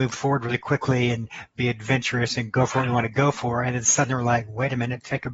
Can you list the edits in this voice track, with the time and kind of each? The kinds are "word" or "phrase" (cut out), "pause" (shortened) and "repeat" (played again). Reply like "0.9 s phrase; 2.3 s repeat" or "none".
none

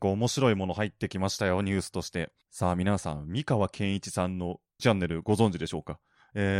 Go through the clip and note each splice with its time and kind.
4.8 s word

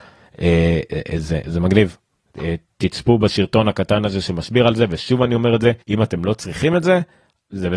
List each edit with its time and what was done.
5.8 s pause

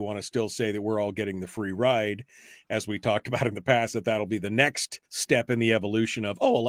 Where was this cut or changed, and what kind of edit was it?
5.1 s pause

